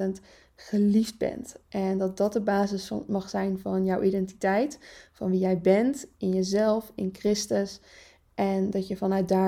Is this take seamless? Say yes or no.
yes